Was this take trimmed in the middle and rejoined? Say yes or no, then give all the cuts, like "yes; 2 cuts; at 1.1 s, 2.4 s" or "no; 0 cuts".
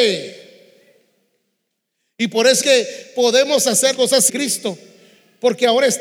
yes; 3 cuts; at 2.6 s, 3.9 s, 4.3 s